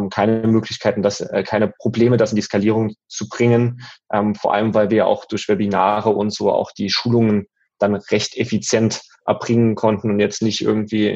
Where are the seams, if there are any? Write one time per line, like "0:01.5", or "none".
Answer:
none